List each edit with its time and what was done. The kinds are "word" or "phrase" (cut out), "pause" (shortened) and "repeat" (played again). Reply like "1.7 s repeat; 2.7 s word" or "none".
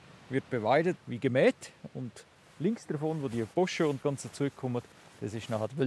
3.5 s pause; 4.0 s word

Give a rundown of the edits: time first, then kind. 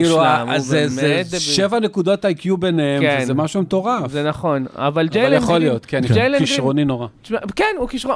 none

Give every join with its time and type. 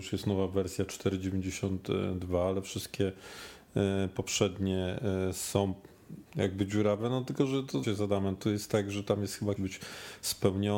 6.3 s pause; 7.8 s word; 8.4 s word; 9.6 s phrase

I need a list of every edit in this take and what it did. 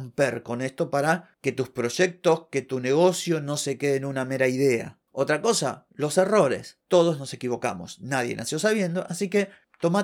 none

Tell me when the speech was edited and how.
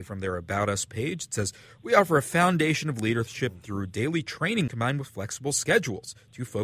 4.7 s word

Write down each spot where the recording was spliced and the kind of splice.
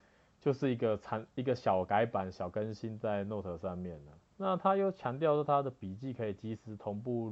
4.3 s pause

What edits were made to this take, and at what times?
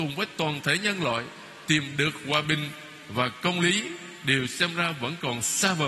none

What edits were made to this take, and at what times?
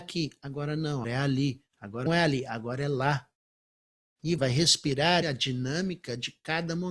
1.0 s word; 2.1 s word; 4.4 s word; 5.2 s phrase

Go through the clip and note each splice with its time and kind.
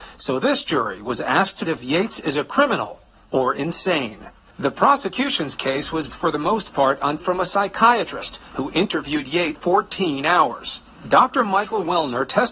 1.7 s word; 6.1 s word; 7.2 s word; 9.5 s word

